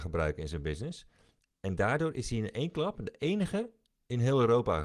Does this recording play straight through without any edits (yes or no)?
yes